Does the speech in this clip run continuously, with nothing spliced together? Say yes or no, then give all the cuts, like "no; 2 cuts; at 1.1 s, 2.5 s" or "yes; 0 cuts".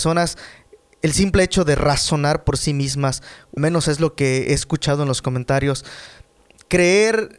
no; 1 cut; at 3.6 s